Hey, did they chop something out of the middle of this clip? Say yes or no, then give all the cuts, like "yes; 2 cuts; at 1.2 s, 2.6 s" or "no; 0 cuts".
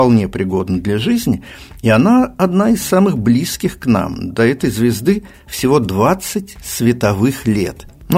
no; 0 cuts